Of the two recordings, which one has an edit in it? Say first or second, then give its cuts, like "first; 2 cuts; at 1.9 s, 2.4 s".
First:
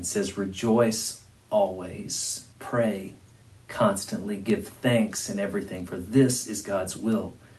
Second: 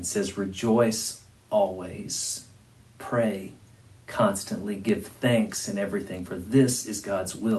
first; 1 cut; at 2.5 s